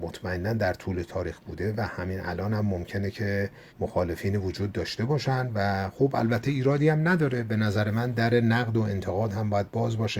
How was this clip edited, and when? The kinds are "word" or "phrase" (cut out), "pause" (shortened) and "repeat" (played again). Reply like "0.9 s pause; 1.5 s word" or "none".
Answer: 3.7 s pause